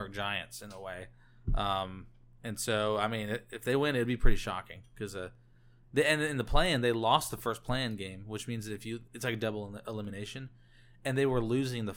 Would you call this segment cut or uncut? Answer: uncut